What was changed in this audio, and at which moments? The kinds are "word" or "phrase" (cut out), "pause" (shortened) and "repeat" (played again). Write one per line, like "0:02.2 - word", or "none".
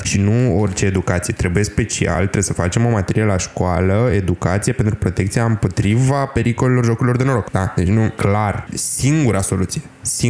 none